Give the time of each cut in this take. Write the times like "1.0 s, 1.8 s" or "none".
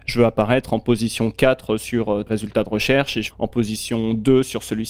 2.3 s, 3.3 s